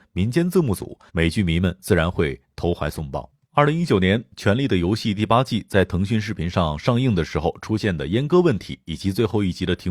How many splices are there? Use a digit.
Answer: 2